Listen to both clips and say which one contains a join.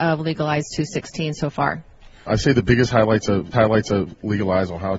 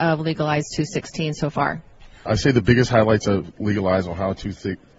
first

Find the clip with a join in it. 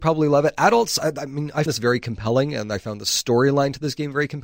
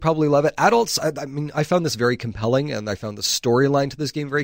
first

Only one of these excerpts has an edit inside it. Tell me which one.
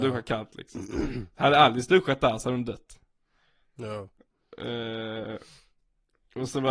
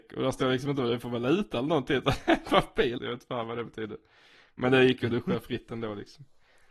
second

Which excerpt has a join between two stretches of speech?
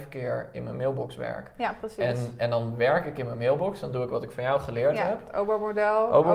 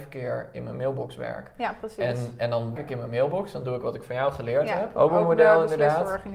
second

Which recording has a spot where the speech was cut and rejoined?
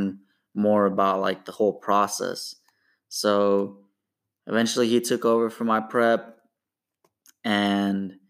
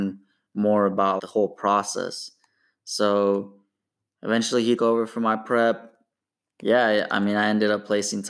second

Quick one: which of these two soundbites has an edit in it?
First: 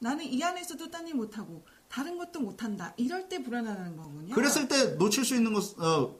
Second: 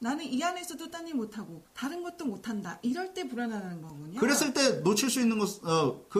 second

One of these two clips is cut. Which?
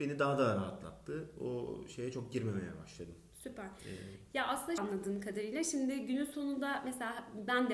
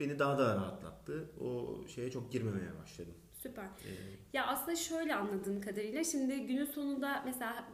first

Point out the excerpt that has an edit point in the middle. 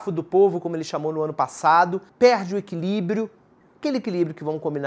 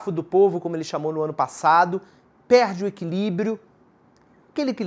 first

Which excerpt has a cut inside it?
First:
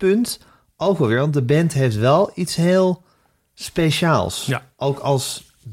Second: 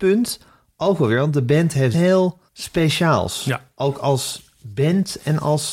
second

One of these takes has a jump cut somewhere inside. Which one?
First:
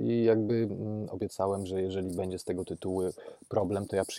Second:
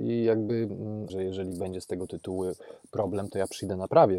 second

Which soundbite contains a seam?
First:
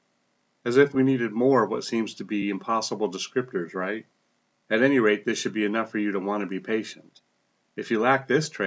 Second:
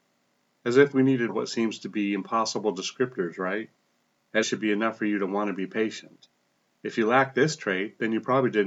second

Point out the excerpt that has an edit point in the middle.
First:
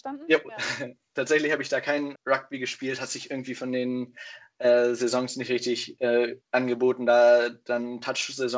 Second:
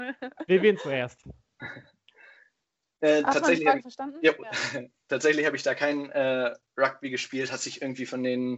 first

